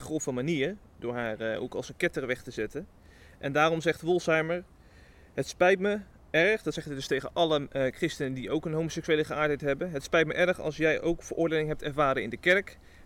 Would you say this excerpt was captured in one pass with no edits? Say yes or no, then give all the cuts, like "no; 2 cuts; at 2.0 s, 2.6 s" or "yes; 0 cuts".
yes; 0 cuts